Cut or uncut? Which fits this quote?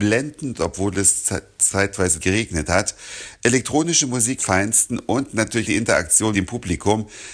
cut